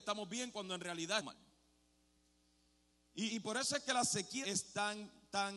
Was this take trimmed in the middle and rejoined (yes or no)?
yes